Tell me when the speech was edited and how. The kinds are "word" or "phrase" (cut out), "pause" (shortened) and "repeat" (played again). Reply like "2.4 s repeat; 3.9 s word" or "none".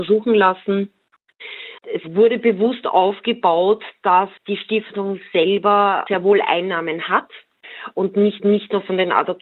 1.8 s pause; 4.4 s pause; 8.4 s repeat